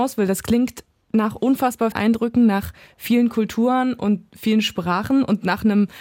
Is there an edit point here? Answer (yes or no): yes